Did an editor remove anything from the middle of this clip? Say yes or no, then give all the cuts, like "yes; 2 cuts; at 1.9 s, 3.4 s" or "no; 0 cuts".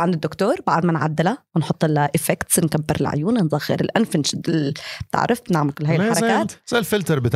no; 0 cuts